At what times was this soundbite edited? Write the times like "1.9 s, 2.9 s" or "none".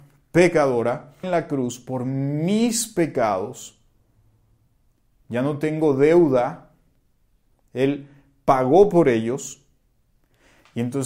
1.2 s